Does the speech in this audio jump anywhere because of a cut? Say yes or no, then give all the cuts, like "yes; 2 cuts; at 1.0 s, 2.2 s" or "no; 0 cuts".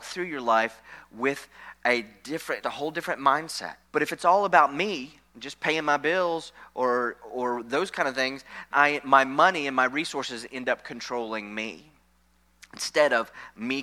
yes; 4 cuts; at 2.6 s, 3.8 s, 5.3 s, 8.7 s